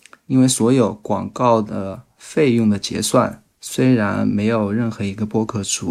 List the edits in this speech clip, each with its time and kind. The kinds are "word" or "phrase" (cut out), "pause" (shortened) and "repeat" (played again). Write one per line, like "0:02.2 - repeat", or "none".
0:03.5 - pause